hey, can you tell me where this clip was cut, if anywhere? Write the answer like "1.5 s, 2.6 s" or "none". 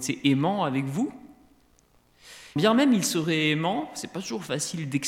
2.6 s